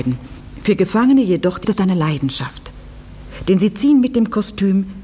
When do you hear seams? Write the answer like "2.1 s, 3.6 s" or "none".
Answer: 1.6 s